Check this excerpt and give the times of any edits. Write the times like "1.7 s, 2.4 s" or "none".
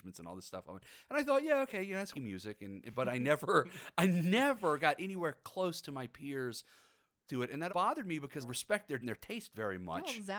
2.1 s, 7.3 s, 7.7 s, 8.4 s, 9.0 s